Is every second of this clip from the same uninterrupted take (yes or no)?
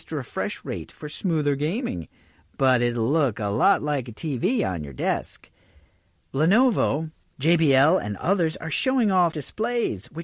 no